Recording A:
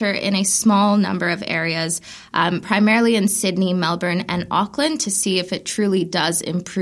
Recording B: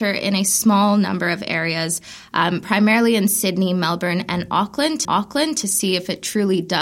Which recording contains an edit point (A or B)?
B